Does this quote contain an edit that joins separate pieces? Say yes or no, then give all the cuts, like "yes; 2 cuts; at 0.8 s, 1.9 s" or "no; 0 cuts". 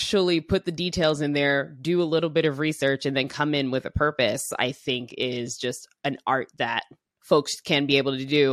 no; 0 cuts